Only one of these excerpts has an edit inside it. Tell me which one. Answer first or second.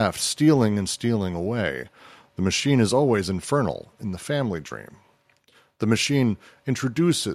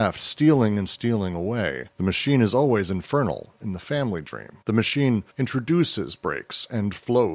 second